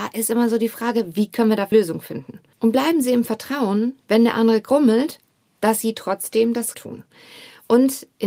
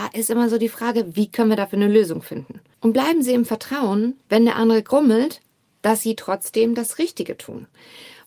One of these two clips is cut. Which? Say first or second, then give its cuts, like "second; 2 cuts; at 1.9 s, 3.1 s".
first; 2 cuts; at 1.7 s, 6.7 s